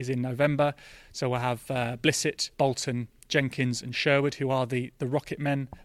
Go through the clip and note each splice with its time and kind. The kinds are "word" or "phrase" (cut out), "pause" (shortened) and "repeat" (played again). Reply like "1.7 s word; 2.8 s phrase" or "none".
2.5 s pause

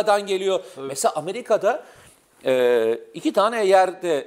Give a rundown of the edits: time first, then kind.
none

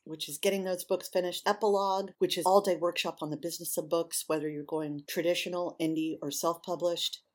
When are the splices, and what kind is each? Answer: 1.4 s word; 2.4 s word

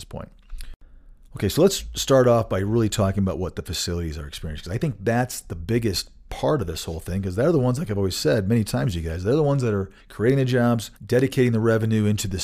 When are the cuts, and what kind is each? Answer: 10.0 s pause; 11.0 s pause

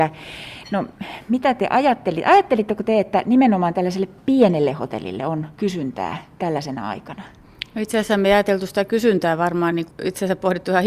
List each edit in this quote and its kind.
5.5 s pause; 9.9 s word

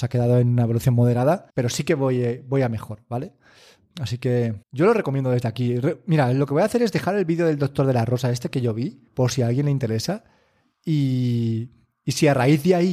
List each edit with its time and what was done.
1.5 s pause; 4.6 s pause; 9.1 s pause

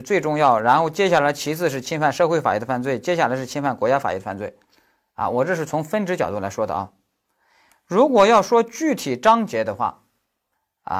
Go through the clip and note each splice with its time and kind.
none

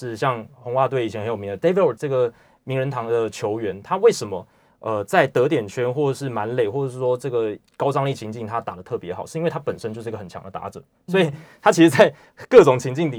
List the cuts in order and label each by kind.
2.0 s word

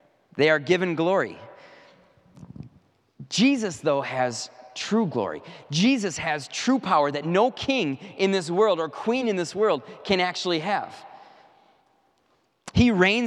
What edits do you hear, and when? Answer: none

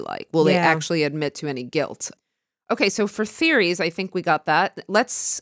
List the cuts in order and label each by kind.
none

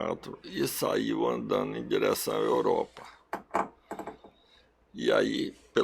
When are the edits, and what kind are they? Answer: none

